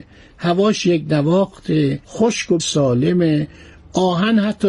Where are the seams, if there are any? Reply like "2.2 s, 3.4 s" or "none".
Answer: 2.0 s, 2.6 s